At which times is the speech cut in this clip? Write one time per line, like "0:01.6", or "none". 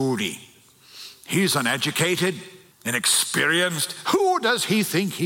0:02.7